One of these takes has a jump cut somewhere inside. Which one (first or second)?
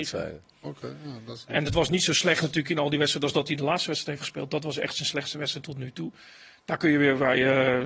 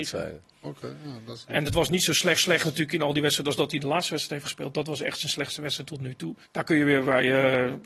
second